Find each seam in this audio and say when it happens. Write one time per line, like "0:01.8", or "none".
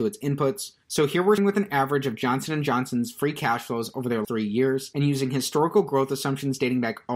0:01.4
0:04.2